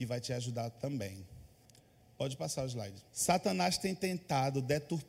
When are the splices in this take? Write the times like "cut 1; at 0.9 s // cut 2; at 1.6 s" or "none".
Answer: cut 1; at 1.6 s // cut 2; at 3.1 s